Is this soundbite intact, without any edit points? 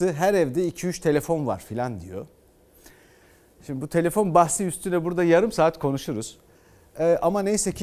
yes; 0 cuts

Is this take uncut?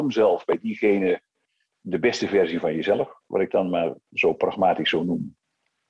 yes; 0 cuts

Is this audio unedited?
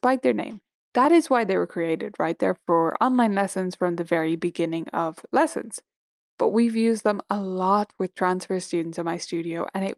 yes; 0 cuts

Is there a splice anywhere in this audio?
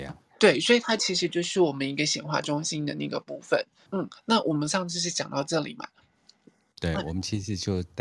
yes; 1 cut; at 3.9 s

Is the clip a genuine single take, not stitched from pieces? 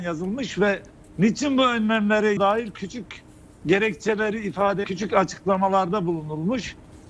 no; 2 cuts; at 2.4 s, 4.8 s

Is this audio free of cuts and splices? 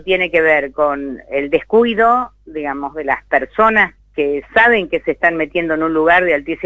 no; 1 cut; at 4.0 s

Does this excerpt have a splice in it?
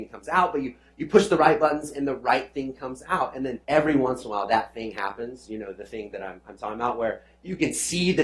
yes; 1 cut; at 3.6 s

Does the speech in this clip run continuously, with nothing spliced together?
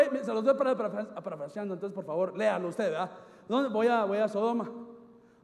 yes; 0 cuts

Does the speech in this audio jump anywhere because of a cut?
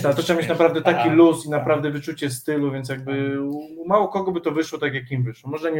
no; 0 cuts

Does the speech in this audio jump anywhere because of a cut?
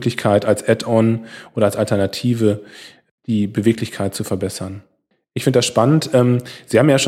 no; 0 cuts

